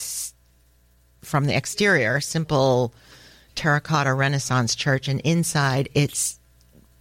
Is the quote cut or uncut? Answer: uncut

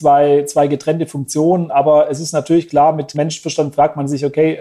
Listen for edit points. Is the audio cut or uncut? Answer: cut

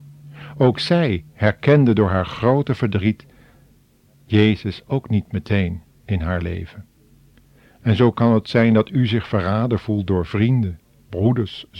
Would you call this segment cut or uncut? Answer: uncut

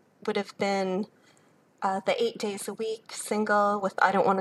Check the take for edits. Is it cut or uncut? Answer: uncut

